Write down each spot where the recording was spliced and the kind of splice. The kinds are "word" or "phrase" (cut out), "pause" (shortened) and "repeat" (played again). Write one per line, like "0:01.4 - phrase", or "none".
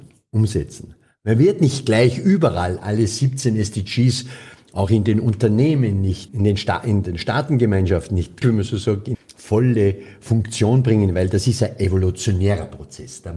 0:06.3 - word
0:08.4 - word
0:09.1 - word